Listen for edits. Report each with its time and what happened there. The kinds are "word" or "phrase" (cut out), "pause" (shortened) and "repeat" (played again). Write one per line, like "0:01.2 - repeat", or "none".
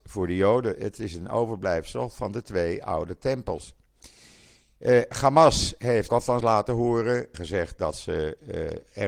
0:06.1 - word
0:06.4 - word
0:07.3 - word